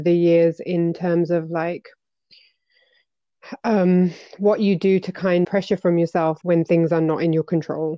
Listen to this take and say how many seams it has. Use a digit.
3